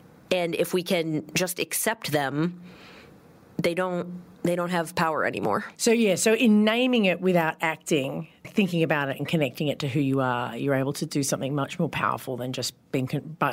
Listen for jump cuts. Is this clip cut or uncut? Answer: cut